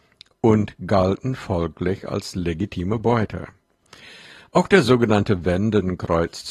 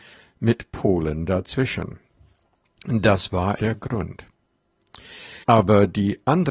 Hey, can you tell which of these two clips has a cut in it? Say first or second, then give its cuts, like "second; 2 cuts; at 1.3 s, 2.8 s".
second; 2 cuts; at 3.6 s, 5.4 s